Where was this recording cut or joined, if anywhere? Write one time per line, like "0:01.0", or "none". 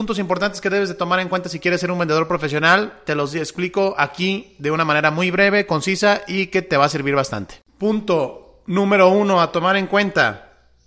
0:07.7